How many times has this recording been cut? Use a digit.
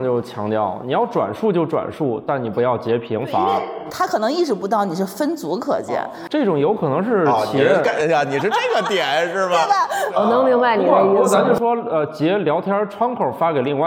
1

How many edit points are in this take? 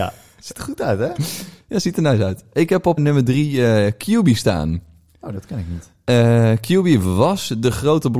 1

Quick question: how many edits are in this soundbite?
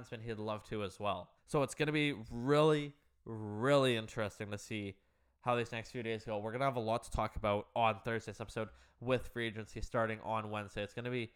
1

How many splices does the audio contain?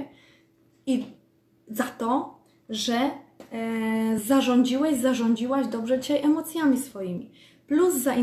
0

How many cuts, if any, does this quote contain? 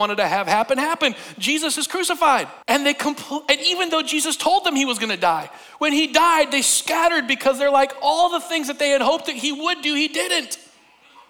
1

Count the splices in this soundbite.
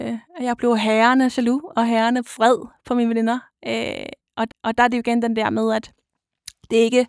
1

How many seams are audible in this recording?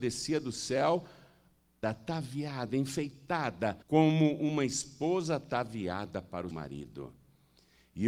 3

